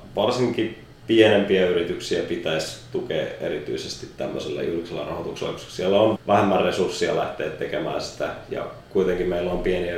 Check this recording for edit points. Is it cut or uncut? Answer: cut